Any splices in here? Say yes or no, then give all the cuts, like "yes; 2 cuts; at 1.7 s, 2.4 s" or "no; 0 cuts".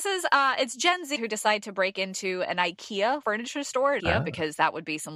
yes; 3 cuts; at 1.2 s, 3.2 s, 4.0 s